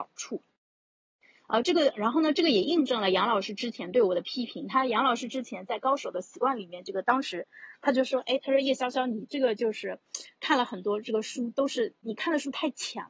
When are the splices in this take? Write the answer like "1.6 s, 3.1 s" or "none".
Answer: none